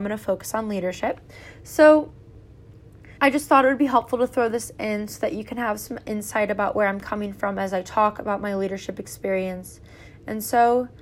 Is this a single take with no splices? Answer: no; 1 cut; at 3.2 s

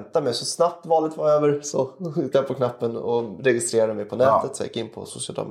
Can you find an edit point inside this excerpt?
yes; 1 cut; at 2.3 s

